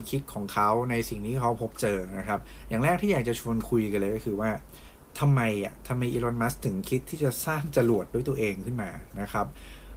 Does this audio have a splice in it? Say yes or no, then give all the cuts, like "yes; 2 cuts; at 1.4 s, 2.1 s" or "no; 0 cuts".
no; 0 cuts